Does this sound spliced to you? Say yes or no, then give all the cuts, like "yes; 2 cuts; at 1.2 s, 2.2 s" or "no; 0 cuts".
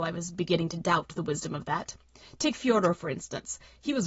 no; 0 cuts